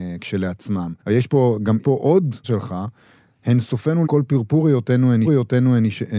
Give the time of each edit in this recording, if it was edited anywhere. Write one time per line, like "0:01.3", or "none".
0:01.0
0:01.8
0:02.4
0:04.0
0:05.2